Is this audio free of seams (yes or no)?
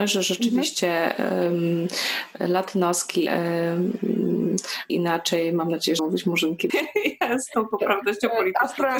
no